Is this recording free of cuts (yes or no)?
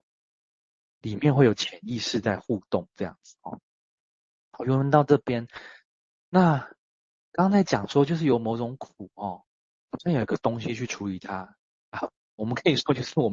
yes